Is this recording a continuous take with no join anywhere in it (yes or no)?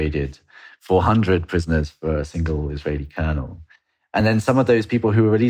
yes